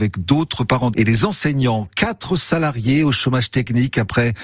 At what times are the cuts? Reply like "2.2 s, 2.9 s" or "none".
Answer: 0.9 s